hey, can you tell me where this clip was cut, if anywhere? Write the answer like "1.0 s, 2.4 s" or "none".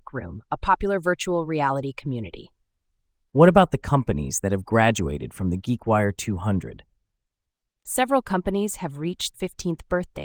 9.3 s